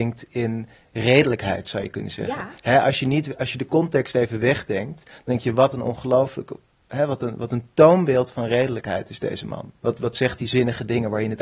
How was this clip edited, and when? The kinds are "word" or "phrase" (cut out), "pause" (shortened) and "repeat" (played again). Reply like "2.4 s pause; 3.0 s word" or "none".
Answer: 9.8 s pause